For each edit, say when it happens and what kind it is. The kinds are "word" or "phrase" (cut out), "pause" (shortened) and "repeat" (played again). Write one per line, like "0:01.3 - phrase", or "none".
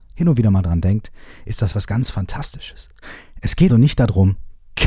0:03.7 - word